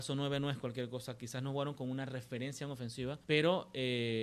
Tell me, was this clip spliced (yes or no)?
yes